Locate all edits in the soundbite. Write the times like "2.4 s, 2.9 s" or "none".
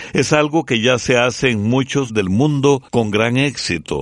2.1 s, 2.9 s